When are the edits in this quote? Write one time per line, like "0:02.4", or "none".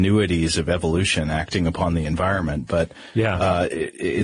none